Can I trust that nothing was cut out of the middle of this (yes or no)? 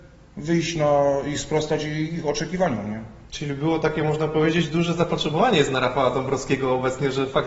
yes